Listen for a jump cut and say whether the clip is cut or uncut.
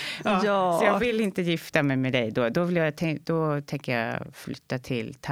uncut